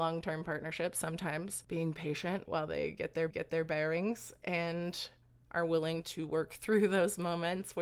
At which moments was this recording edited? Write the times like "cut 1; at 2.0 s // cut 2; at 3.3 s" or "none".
cut 1; at 3.3 s